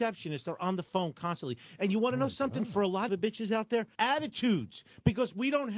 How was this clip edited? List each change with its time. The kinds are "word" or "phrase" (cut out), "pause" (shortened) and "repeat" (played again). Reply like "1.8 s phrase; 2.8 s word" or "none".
3.1 s phrase; 3.9 s phrase